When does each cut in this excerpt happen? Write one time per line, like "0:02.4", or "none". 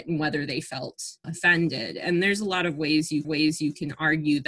0:01.2
0:03.2